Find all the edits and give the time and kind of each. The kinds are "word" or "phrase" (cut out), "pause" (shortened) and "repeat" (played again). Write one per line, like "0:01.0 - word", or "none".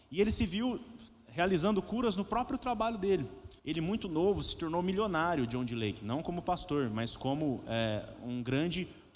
0:03.6 - pause